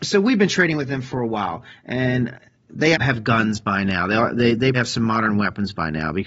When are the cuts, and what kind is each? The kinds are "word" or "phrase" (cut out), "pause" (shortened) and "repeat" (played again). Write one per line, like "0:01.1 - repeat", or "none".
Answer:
0:02.9 - word
0:04.7 - word